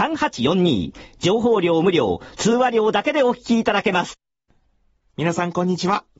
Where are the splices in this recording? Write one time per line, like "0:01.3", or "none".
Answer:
none